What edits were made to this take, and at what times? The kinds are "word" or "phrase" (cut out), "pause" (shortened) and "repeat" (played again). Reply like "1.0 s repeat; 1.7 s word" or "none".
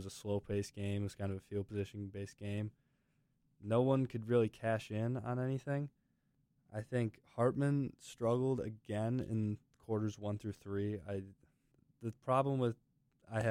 none

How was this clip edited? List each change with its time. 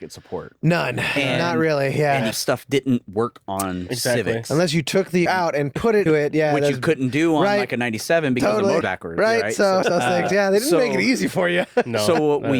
2.3 s word; 5.3 s phrase; 6.1 s word; 8.8 s phrase; 9.8 s phrase

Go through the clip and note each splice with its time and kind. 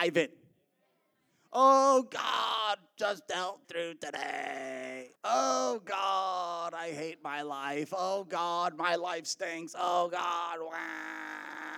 3.6 s phrase; 5.2 s pause

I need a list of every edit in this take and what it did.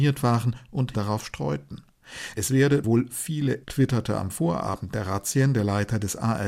0.9 s word; 2.8 s word; 3.6 s phrase

